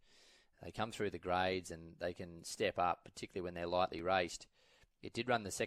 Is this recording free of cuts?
yes; 0 cuts

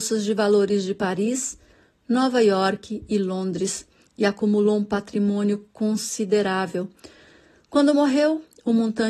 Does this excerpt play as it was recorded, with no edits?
yes; 0 cuts

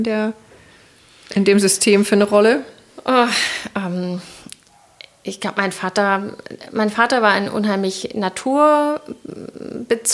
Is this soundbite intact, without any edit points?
yes; 0 cuts

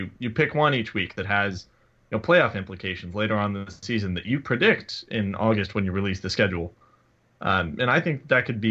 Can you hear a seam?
yes; 1 cut; at 4.4 s

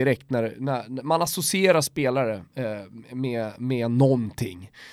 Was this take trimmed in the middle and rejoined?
no; 0 cuts

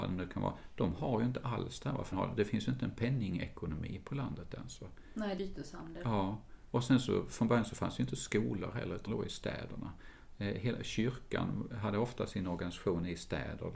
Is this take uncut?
no; 3 cuts; at 2.1 s, 5.4 s, 9.1 s

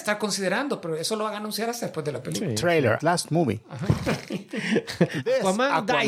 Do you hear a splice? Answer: yes; 1 cut; at 3.0 s

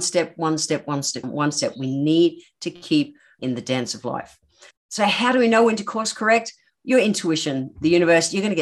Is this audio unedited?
no; 2 cuts; at 1.2 s, 3.4 s

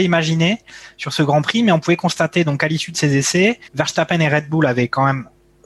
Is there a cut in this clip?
yes; 1 cut; at 3.7 s

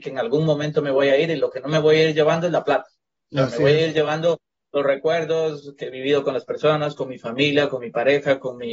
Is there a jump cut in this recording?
no; 0 cuts

